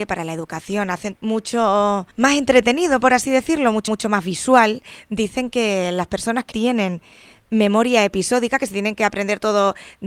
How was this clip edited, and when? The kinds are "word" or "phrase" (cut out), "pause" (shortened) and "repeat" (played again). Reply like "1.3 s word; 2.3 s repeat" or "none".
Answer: 1.1 s word; 2.1 s pause; 3.9 s repeat; 6.5 s word